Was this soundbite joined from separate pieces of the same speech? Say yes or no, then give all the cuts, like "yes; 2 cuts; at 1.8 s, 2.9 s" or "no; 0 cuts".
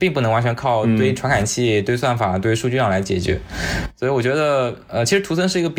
no; 0 cuts